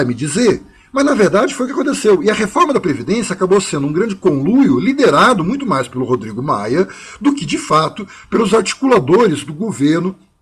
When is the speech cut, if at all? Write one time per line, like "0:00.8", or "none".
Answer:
none